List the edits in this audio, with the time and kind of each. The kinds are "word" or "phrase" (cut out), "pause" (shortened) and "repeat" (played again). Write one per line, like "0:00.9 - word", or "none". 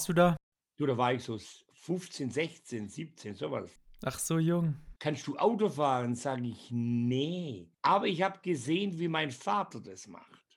0:05.0 - pause
0:07.7 - pause